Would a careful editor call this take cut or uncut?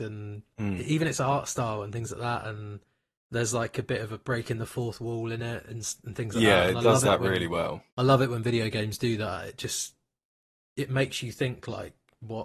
cut